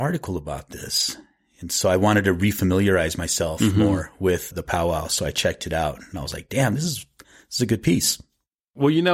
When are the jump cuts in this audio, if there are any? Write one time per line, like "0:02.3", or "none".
0:04.5